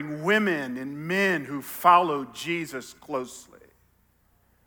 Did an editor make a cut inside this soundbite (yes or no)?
no